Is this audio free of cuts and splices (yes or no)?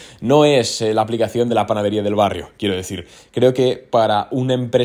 yes